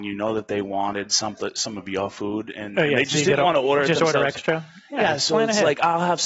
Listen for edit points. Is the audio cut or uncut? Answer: uncut